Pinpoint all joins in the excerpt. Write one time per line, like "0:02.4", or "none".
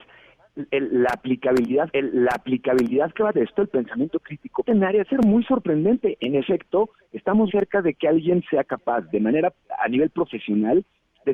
0:01.9
0:03.3
0:04.6
0:05.1
0:07.5